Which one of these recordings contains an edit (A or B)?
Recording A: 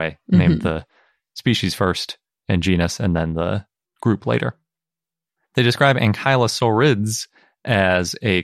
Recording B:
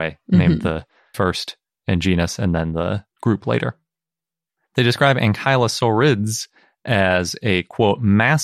B